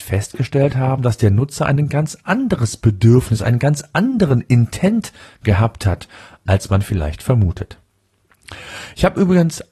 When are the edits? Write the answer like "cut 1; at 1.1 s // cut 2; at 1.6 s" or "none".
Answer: none